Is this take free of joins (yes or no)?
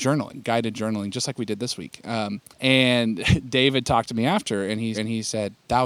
no